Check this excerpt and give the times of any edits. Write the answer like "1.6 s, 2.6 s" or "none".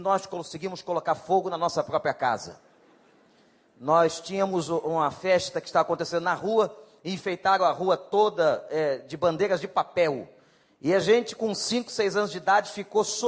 none